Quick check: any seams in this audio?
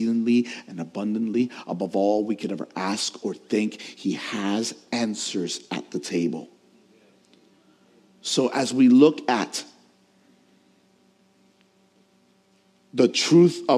no; 0 cuts

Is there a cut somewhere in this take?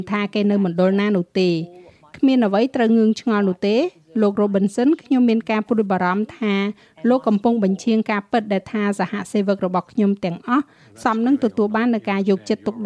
no; 0 cuts

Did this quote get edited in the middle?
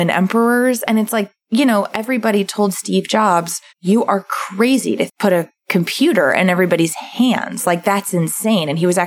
yes; 4 cuts; at 1.4 s, 3.7 s, 5.1 s, 5.6 s

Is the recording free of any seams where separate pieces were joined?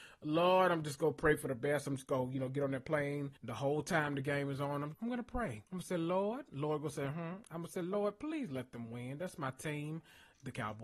no; 3 cuts; at 3.4 s, 4.9 s, 5.7 s

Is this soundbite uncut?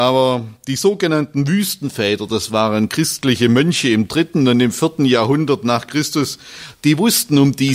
yes; 0 cuts

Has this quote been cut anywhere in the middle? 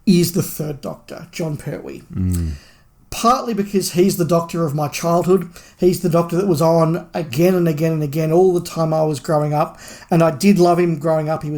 no; 0 cuts

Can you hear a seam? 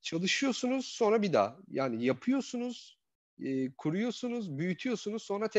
no; 0 cuts

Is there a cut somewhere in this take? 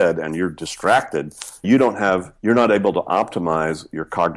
yes; 2 cuts; at 1.6 s, 2.4 s

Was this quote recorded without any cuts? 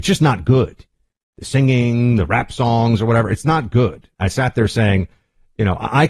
yes; 0 cuts

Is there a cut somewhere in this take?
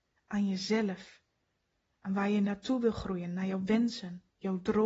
no; 0 cuts

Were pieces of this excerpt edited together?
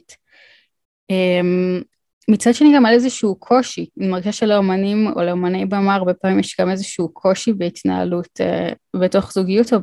no; 0 cuts

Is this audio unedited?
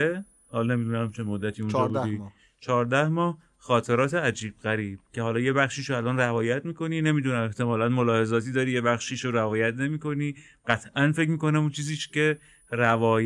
yes; 0 cuts

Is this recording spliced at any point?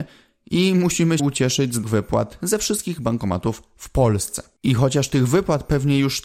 yes; 3 cuts; at 1.2 s, 1.8 s, 4.6 s

